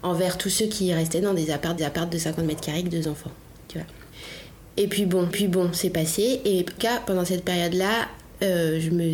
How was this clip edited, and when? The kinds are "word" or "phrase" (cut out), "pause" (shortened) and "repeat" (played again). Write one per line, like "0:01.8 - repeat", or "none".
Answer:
0:01.8 - repeat
0:05.3 - repeat
0:06.8 - phrase